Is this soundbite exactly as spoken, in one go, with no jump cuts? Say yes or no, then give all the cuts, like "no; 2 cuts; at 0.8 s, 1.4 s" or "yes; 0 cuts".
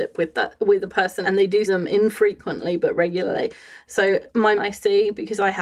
no; 3 cuts; at 1.2 s, 1.7 s, 4.6 s